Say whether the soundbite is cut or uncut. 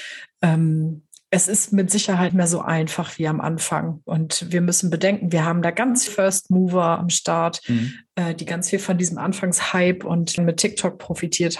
cut